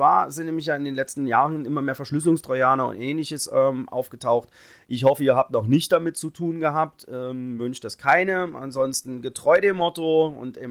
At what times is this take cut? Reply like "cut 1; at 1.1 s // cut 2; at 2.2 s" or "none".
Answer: none